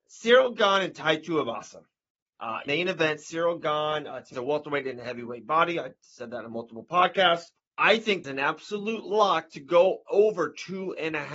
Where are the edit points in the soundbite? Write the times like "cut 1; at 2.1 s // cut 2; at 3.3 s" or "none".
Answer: cut 1; at 2.7 s // cut 2; at 4.3 s // cut 3; at 7.6 s // cut 4; at 8.2 s